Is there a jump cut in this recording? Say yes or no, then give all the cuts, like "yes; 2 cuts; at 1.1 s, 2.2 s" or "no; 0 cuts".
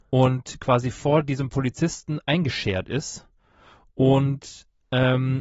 no; 0 cuts